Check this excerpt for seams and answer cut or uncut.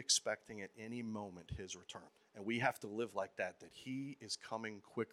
cut